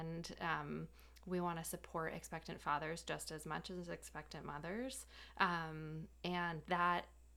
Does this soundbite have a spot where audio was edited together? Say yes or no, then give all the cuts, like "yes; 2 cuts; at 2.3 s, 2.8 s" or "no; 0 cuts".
no; 0 cuts